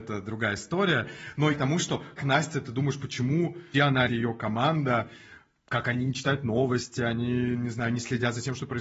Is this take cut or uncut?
cut